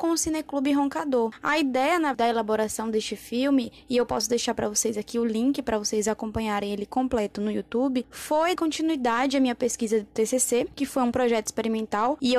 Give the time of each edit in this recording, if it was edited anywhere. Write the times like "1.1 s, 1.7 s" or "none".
2.1 s, 8.6 s